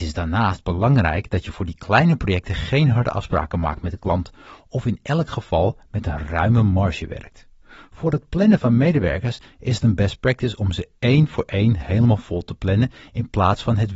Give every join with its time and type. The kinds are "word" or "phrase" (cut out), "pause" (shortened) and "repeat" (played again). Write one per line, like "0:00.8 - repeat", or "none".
0:07.6 - pause